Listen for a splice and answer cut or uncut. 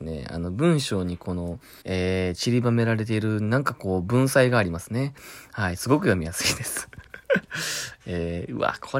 cut